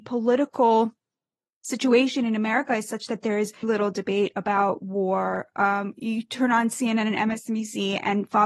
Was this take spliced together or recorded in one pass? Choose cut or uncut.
cut